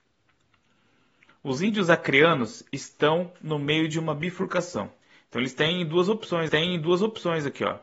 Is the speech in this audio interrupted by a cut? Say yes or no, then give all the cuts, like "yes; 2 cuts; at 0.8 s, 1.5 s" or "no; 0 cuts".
yes; 2 cuts; at 5.0 s, 6.5 s